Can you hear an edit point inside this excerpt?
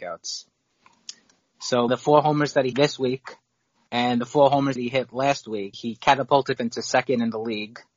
yes; 5 cuts; at 1.9 s, 2.7 s, 4.8 s, 5.7 s, 6.6 s

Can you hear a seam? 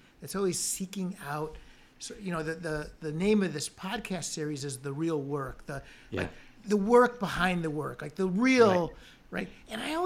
yes; 1 cut; at 6.6 s

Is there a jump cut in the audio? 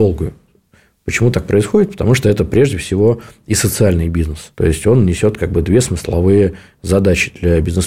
yes; 1 cut; at 4.5 s

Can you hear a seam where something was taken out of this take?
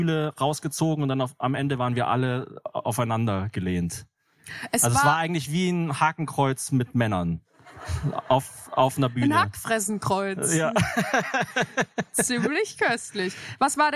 no; 0 cuts

